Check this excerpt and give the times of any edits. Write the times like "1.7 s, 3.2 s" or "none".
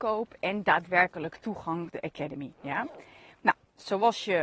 1.9 s